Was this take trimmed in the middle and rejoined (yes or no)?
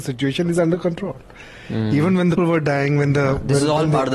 yes